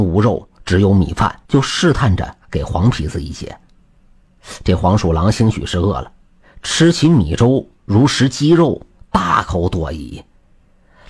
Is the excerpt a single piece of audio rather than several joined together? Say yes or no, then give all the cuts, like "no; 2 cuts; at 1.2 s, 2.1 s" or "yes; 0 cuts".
no; 1 cut; at 1.5 s